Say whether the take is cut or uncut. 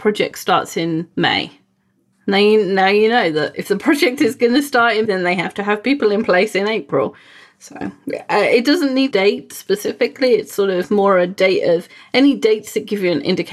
cut